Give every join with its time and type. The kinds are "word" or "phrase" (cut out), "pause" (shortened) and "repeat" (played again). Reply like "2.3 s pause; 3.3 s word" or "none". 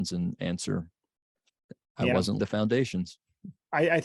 2.4 s word